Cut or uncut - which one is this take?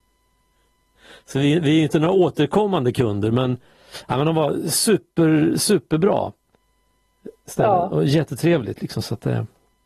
uncut